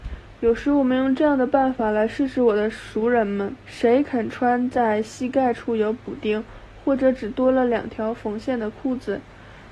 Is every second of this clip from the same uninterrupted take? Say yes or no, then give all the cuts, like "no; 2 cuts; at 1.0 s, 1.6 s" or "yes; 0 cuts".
no; 1 cut; at 3.6 s